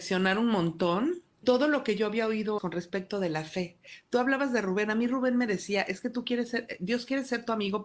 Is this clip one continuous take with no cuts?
no; 2 cuts; at 1.4 s, 2.6 s

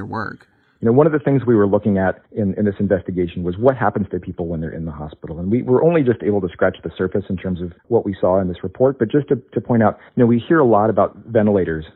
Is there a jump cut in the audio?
yes; 3 cuts; at 2.2 s, 7.8 s, 10.1 s

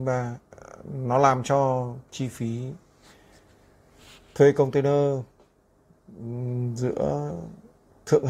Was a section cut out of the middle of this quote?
no; 0 cuts

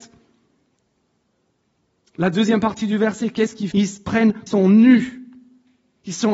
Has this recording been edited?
yes; 2 cuts; at 3.7 s, 4.5 s

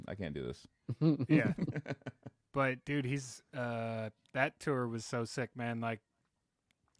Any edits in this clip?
yes; 1 cut; at 2.8 s

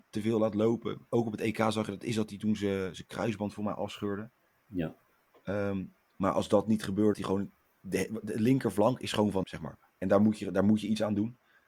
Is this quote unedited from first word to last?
no; 2 cuts; at 7.1 s, 9.4 s

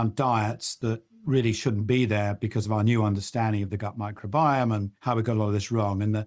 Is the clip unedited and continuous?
no; 1 cut; at 5.0 s

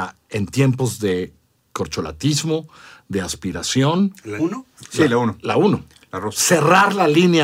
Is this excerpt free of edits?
no; 1 cut; at 4.4 s

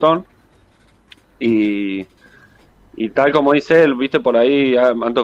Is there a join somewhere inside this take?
no; 0 cuts

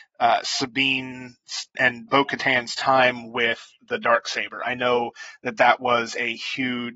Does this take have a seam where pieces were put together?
yes; 2 cuts; at 1.7 s, 2.1 s

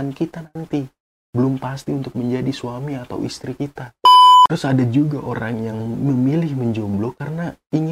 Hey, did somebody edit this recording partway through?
no; 0 cuts

